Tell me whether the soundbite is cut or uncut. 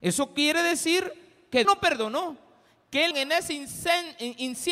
cut